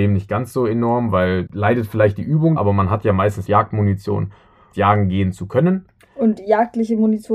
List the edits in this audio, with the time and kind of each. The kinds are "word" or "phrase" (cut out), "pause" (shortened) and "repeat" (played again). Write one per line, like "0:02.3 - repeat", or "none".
0:01.5 - word
0:02.6 - word
0:03.4 - phrase
0:04.7 - phrase